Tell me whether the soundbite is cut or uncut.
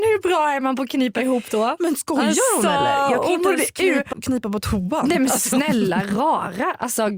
cut